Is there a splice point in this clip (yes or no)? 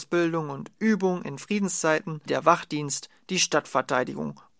yes